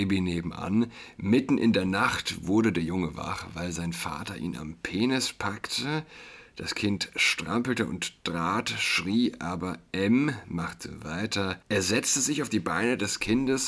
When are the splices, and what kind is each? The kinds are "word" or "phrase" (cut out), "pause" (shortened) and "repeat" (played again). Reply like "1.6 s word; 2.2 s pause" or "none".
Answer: 11.6 s pause

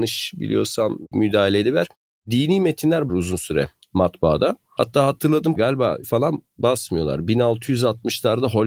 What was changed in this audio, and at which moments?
1.1 s word; 3.1 s word; 5.6 s word; 6.0 s word

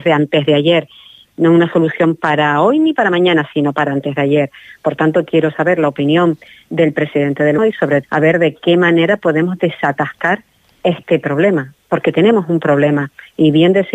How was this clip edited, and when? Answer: 7.6 s word; 8.0 s word

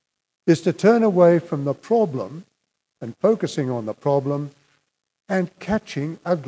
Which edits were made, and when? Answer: none

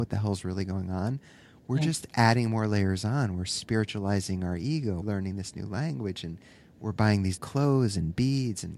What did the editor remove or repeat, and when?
5.0 s word; 7.4 s word

